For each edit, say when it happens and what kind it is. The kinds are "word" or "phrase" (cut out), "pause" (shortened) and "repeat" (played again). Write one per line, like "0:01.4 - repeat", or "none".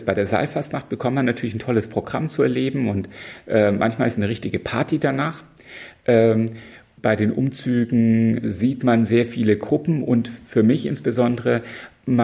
0:07.0 - word
0:08.4 - word